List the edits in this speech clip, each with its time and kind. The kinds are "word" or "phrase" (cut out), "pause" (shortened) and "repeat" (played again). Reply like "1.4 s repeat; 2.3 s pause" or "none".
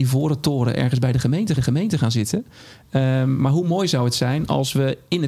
1.6 s repeat